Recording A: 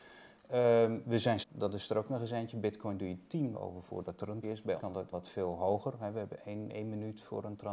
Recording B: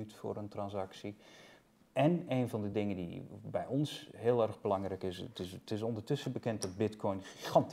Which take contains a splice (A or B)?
A